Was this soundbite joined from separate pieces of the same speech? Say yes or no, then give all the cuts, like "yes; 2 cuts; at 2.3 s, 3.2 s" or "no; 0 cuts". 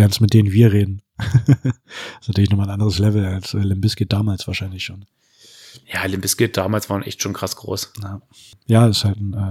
no; 0 cuts